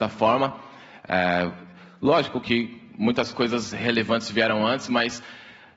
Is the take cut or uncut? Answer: uncut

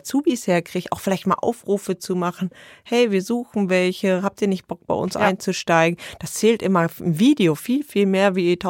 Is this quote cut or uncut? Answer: uncut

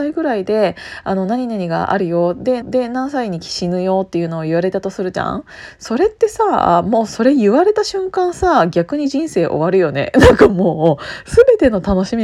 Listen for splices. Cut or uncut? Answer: cut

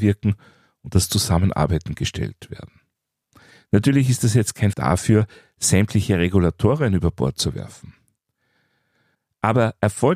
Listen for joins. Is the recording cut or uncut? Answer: cut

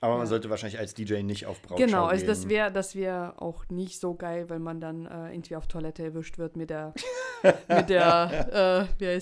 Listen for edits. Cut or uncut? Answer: uncut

